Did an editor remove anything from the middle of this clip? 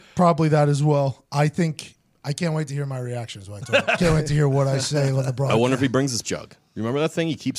yes; 3 cuts; at 4.0 s, 5.1 s, 6.2 s

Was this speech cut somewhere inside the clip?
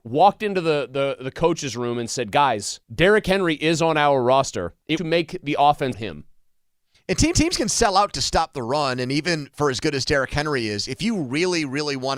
yes; 4 cuts; at 2.8 s, 5.0 s, 5.9 s, 7.3 s

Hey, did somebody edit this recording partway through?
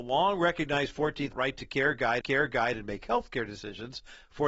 yes; 2 cuts; at 1.3 s, 2.2 s

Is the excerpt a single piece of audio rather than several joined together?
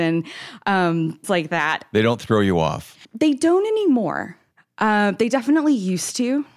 no; 2 cuts; at 1.2 s, 3.0 s

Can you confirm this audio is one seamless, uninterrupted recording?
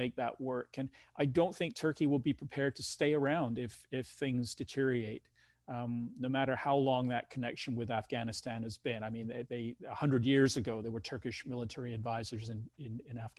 yes; 0 cuts

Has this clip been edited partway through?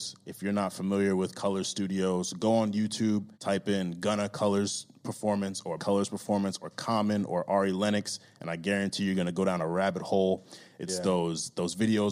yes; 2 cuts; at 3.3 s, 5.8 s

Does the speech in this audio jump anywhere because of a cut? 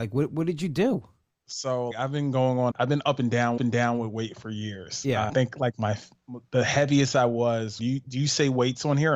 yes; 5 cuts; at 1.9 s, 2.7 s, 3.6 s, 5.3 s, 7.8 s

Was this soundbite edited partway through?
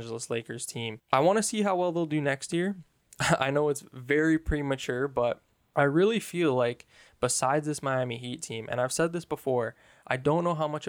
no; 0 cuts

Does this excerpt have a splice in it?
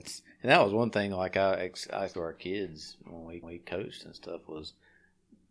yes; 2 cuts; at 2.1 s, 3.4 s

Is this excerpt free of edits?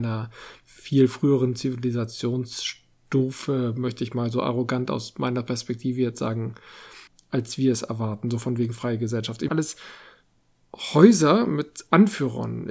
no; 2 cuts; at 7.1 s, 9.5 s

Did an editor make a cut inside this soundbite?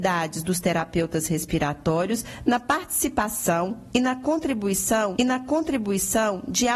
yes; 1 cut; at 5.2 s

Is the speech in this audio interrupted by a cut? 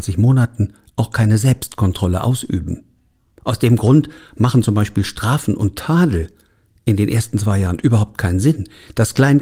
no; 0 cuts

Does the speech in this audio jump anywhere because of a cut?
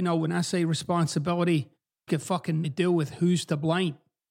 yes; 2 cuts; at 2.1 s, 2.6 s

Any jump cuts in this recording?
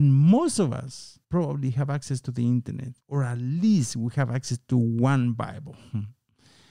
yes; 2 cuts; at 1.2 s, 3.0 s

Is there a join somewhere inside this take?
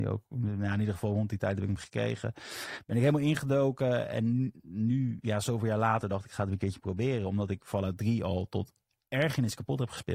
no; 0 cuts

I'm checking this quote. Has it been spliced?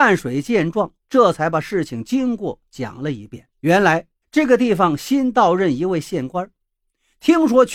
yes; 3 cuts; at 1.0 s, 3.5 s, 4.2 s

